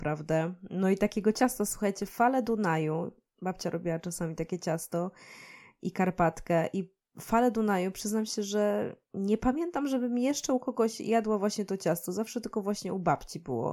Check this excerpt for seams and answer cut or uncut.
uncut